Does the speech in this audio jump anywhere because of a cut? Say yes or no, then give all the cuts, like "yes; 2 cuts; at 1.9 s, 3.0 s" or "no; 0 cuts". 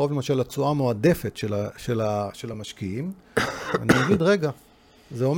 no; 0 cuts